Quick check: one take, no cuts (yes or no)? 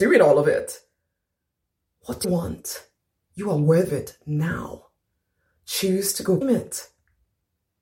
no